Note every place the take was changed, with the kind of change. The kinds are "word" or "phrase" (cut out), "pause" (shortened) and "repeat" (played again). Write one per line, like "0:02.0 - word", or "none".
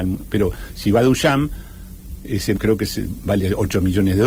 0:02.5 - word